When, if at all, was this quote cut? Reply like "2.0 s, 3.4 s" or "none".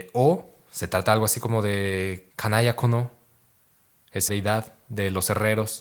2.3 s, 4.3 s